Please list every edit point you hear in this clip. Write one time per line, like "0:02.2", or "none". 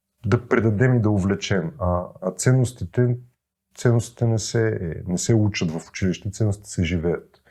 none